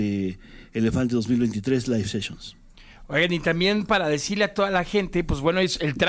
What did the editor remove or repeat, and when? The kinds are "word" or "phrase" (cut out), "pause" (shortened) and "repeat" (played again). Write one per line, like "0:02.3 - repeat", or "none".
none